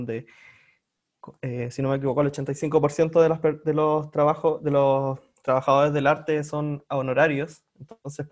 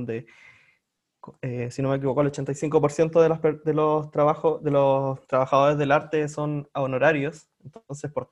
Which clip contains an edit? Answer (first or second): second